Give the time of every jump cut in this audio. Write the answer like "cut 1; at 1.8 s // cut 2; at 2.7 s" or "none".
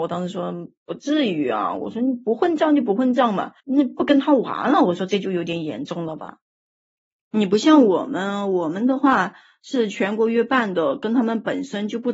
cut 1; at 3.6 s